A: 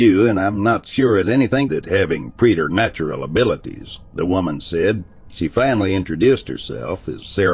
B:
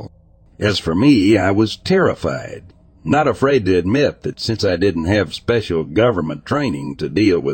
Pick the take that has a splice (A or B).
A